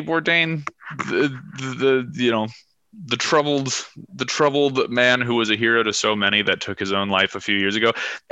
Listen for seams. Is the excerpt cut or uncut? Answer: uncut